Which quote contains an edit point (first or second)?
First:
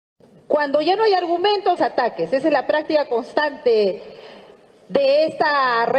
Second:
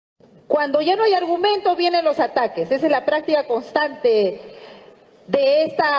first